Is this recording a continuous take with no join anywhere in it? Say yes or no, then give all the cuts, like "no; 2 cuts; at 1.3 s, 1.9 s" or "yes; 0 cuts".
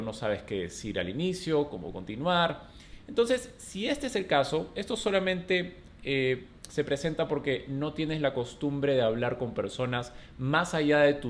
yes; 0 cuts